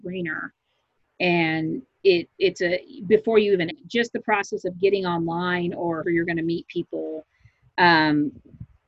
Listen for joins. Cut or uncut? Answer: cut